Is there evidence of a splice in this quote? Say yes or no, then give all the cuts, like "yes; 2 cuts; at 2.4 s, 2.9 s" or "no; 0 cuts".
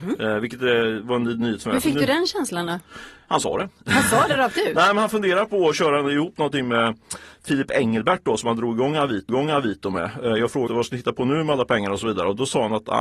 yes; 2 cuts; at 9.3 s, 10.7 s